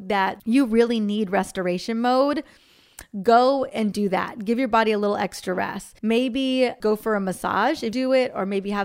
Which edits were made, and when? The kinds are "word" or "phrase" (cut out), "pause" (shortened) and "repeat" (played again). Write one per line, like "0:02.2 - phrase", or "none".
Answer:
0:03.9 - word
0:06.0 - pause
0:07.9 - phrase